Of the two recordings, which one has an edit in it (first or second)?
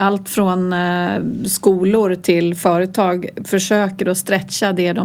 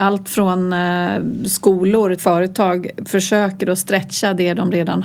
second